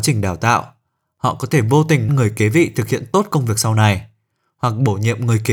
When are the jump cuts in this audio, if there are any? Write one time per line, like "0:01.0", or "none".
0:02.1